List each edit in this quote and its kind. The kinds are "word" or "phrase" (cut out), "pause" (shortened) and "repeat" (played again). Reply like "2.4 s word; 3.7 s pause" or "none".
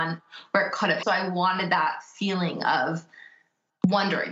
1.0 s phrase